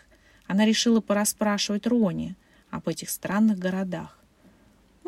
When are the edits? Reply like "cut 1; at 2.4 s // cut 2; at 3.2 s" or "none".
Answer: none